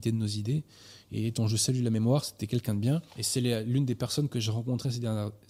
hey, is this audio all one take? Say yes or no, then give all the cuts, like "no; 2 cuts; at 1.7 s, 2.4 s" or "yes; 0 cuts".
no; 1 cut; at 3.1 s